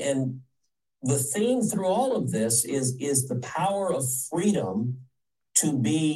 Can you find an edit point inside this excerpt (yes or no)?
no